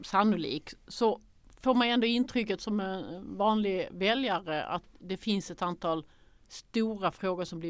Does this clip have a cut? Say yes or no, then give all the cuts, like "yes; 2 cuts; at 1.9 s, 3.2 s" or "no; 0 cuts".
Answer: no; 0 cuts